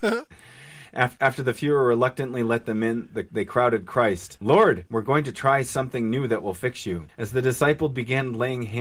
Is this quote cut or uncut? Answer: uncut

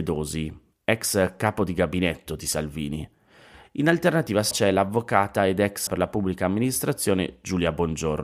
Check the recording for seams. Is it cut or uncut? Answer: cut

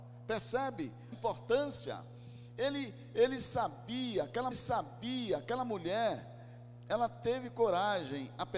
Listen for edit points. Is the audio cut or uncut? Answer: cut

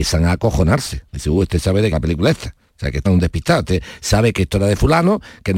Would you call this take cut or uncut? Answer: cut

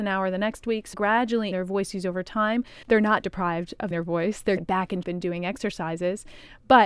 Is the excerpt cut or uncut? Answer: cut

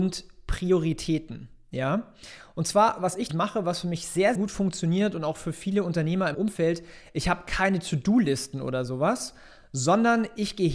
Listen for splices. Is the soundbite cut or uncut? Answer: cut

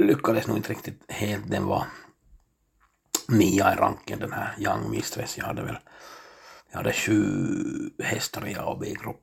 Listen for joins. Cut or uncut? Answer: cut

